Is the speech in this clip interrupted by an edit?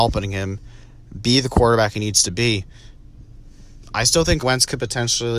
yes; 1 cut; at 4.4 s

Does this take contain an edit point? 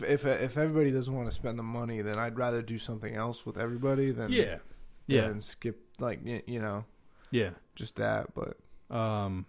no; 0 cuts

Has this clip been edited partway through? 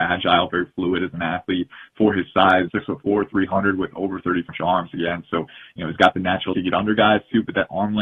yes; 3 cuts; at 2.7 s, 4.5 s, 6.5 s

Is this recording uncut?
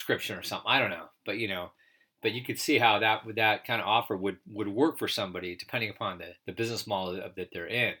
no; 1 cut; at 6.4 s

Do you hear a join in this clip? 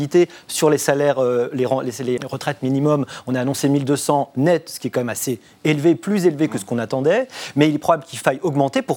yes; 1 cut; at 2.2 s

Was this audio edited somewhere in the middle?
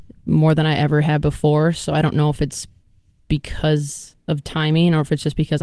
no; 0 cuts

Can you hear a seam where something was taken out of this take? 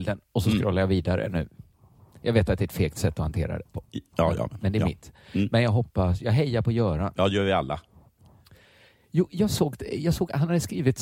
no; 0 cuts

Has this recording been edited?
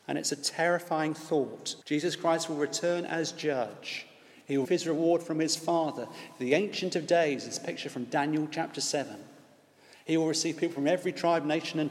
yes; 2 cuts; at 1.8 s, 4.6 s

